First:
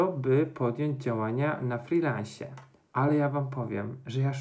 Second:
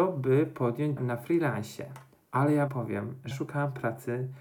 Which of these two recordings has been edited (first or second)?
second